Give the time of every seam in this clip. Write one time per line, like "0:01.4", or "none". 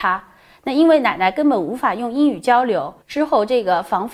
0:03.0